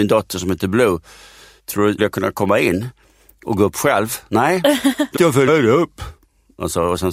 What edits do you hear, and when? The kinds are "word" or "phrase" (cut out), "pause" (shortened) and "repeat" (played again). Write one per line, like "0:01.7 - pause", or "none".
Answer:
0:02.0 - word
0:05.2 - word
0:05.5 - word